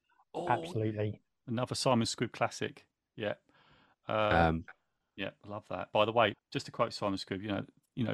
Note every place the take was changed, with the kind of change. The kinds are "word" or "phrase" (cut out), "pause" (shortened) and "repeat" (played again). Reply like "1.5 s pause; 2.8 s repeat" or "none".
6.3 s word